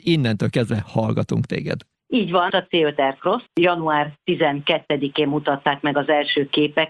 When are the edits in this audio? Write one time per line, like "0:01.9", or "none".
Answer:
0:01.9
0:02.5
0:03.5

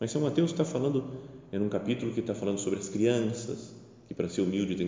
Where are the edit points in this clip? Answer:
none

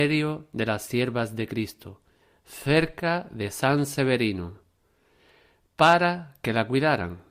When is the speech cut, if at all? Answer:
none

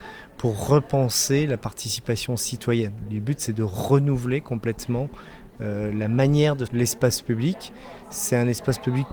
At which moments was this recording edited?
0:06.7

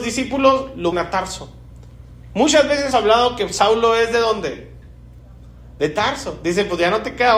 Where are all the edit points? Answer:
0:00.9
0:02.9

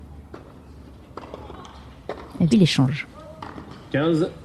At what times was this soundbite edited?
0:02.5

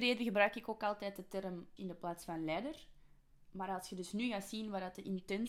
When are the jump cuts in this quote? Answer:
0:01.8

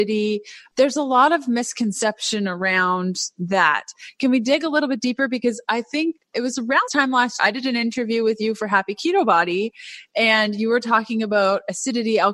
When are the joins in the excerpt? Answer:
0:06.9
0:07.4

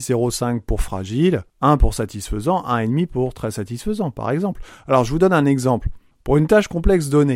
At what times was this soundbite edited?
0:01.5
0:06.1

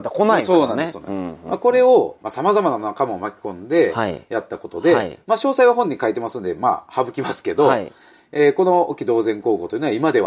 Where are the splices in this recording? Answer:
none

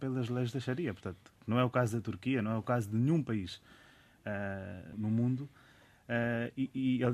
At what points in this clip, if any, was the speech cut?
0:04.9

